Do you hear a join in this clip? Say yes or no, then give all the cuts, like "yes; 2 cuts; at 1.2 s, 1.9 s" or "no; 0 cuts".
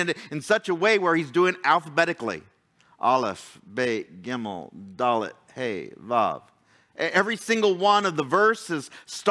no; 0 cuts